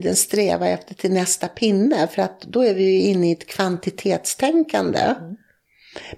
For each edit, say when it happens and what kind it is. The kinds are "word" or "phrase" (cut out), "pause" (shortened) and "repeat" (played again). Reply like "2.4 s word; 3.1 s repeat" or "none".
none